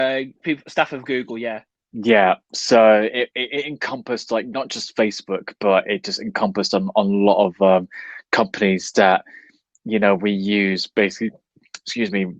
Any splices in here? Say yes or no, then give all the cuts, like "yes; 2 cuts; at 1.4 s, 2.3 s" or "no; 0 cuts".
no; 0 cuts